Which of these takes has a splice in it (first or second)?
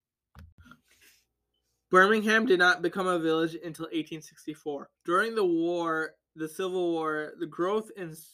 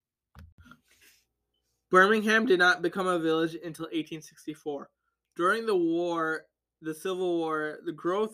first